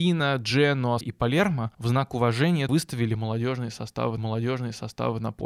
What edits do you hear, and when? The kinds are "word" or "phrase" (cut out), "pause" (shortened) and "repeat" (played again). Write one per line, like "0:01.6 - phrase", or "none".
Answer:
0:01.0 - word
0:01.7 - pause
0:02.7 - word
0:04.2 - repeat